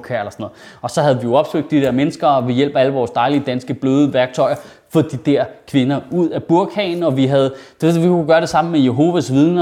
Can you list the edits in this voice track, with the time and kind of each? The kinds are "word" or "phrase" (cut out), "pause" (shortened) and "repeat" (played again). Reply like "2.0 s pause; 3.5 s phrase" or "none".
none

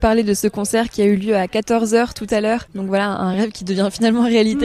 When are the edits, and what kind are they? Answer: none

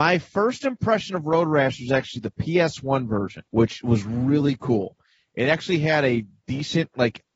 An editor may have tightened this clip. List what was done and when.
3.5 s pause

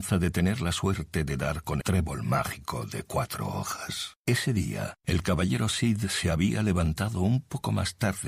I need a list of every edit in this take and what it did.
1.8 s word; 4.2 s pause; 5.0 s pause

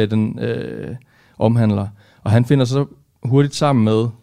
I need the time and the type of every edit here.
none

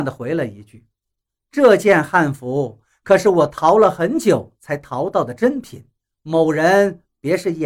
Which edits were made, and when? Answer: 1.0 s pause; 6.0 s pause

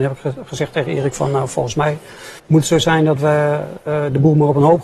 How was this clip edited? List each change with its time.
2.4 s pause

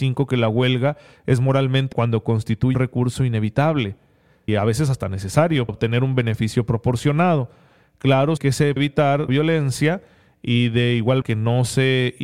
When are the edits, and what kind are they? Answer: 1.9 s word; 2.7 s word; 4.5 s word; 5.7 s word; 8.4 s word; 8.8 s word; 9.3 s word; 11.2 s word

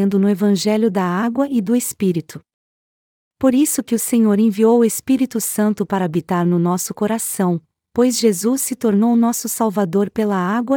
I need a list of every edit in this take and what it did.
none

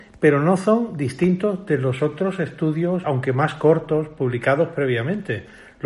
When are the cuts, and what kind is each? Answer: 3.0 s word

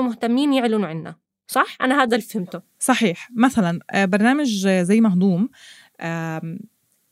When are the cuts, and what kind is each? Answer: none

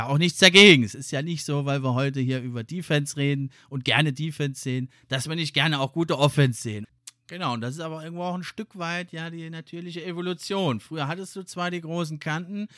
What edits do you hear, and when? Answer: none

